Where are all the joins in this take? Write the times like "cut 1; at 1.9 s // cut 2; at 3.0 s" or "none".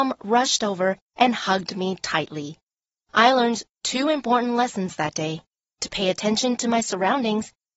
none